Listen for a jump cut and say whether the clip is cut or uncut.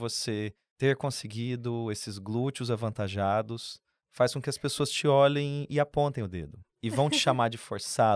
uncut